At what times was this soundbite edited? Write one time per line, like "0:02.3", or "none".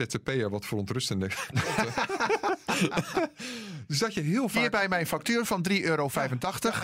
none